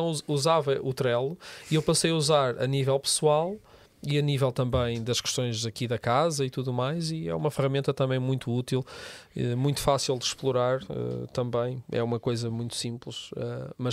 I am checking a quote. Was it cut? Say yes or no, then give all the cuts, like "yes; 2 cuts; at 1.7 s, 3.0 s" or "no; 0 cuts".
no; 0 cuts